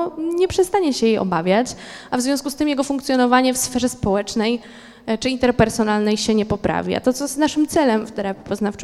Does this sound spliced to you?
no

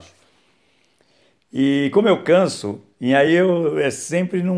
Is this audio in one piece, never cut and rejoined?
yes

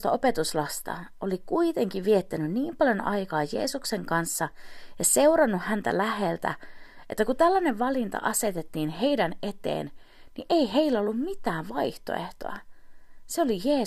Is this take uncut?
yes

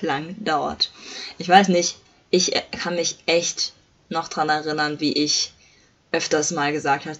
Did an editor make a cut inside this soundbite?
no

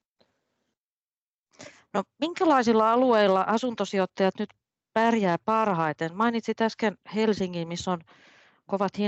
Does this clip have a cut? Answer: no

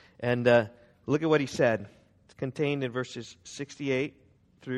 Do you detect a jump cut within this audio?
no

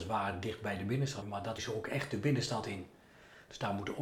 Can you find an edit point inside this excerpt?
yes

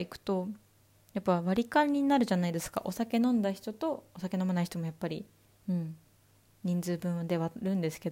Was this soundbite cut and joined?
no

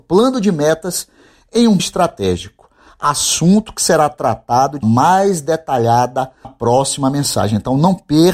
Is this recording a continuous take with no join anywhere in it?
no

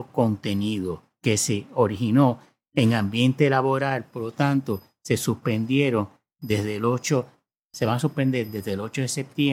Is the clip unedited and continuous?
yes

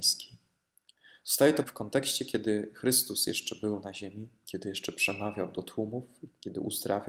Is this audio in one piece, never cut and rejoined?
no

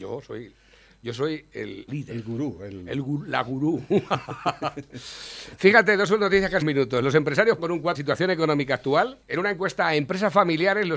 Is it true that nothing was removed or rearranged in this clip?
no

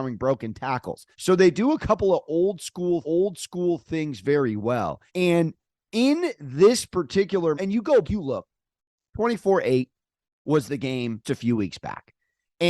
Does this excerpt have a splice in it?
yes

